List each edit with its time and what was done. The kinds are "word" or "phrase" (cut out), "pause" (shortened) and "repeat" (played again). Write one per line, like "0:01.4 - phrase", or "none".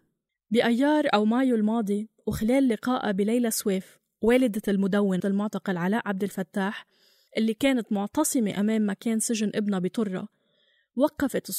0:05.2 - word